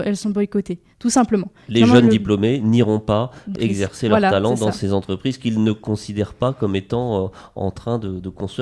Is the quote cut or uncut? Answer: cut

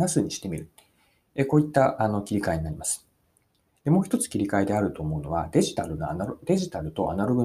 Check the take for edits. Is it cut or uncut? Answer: uncut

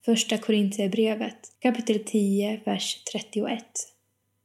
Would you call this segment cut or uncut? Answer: cut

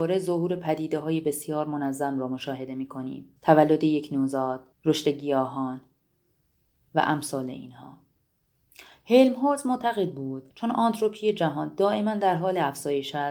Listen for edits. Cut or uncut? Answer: cut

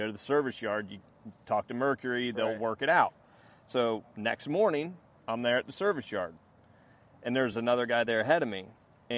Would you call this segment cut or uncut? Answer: uncut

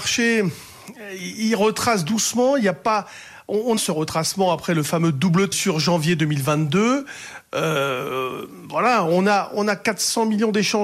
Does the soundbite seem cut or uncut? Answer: cut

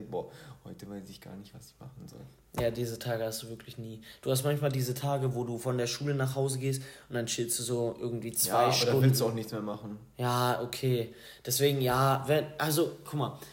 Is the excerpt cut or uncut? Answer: uncut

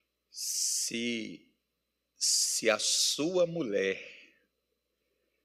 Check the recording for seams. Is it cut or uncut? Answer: uncut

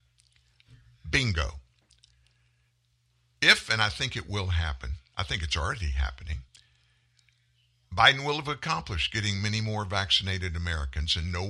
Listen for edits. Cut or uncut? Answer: uncut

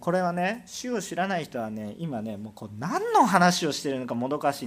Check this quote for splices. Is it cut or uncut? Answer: uncut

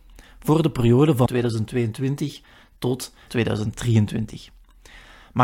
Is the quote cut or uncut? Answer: cut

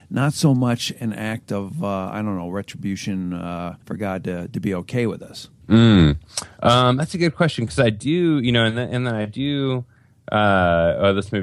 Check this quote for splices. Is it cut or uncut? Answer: cut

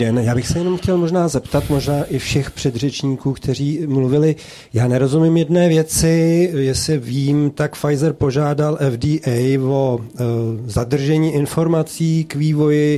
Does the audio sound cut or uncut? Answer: uncut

